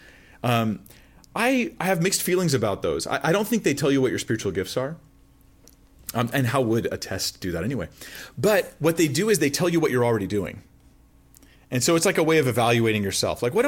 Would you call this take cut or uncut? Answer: uncut